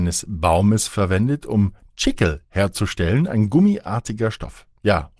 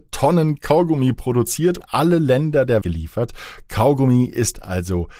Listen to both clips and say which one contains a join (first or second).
second